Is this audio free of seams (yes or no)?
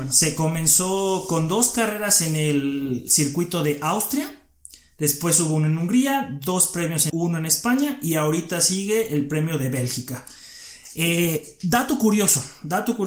no